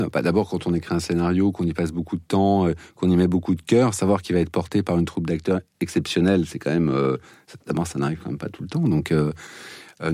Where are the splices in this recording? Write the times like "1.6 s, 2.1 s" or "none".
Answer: none